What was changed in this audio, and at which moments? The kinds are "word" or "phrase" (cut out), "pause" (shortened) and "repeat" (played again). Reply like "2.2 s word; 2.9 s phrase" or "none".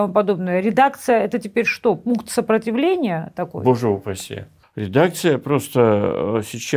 4.6 s pause